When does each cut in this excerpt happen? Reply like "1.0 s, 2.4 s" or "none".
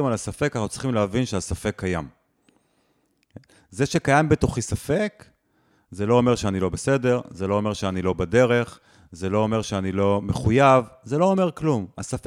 none